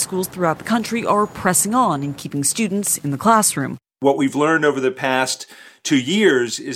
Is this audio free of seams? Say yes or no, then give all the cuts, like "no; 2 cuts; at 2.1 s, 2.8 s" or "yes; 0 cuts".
yes; 0 cuts